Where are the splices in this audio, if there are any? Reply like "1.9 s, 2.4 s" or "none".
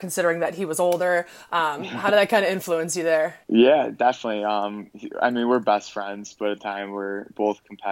3.4 s, 6.6 s